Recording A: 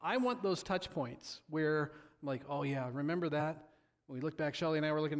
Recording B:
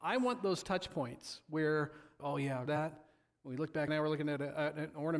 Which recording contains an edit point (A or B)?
B